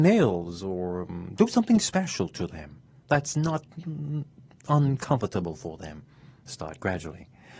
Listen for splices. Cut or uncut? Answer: uncut